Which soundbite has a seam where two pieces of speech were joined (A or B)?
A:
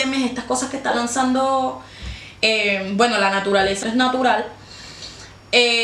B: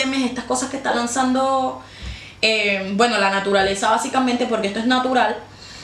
A